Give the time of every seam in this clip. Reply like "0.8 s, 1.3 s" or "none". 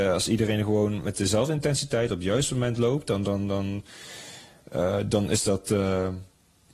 none